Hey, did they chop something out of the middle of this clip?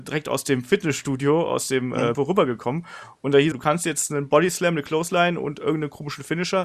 yes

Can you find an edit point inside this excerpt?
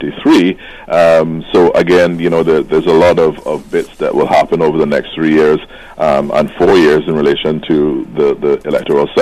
no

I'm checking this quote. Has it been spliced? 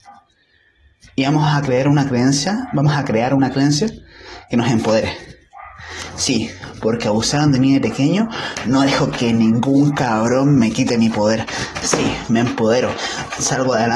no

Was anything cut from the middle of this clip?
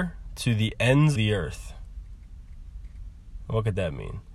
yes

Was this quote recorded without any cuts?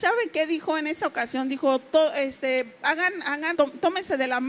no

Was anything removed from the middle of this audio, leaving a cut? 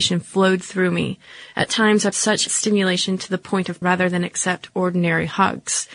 yes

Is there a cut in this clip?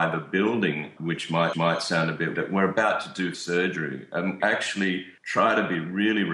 yes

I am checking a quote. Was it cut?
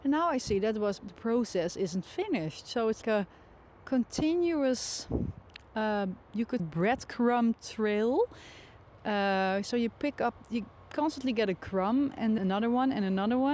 yes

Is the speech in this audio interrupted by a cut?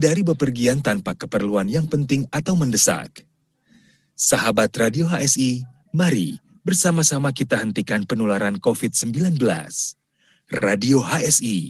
no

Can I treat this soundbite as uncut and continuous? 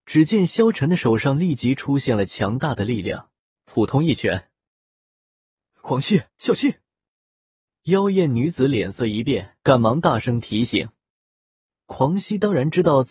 no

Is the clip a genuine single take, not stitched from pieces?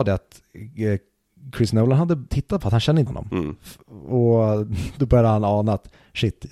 no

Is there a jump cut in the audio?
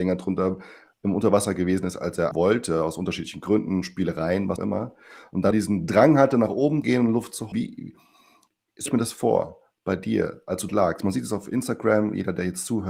yes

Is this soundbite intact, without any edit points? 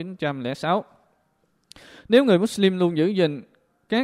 yes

